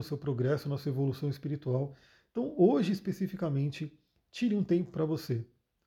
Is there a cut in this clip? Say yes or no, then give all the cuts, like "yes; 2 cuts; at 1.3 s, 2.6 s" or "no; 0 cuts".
no; 0 cuts